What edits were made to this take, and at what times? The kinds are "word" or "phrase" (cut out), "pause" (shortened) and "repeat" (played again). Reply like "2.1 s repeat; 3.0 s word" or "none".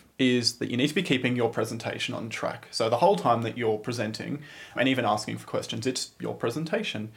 4.8 s word